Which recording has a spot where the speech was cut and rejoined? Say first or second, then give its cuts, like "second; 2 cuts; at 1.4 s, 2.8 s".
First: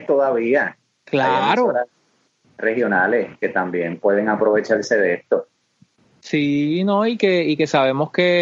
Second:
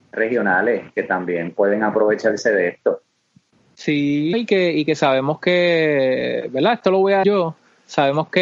second; 2 cuts; at 4.3 s, 7.2 s